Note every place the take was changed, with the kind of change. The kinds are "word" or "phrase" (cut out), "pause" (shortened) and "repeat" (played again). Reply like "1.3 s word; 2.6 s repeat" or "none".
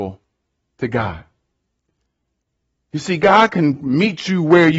none